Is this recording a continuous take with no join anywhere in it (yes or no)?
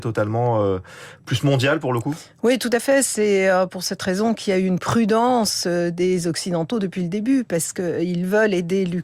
yes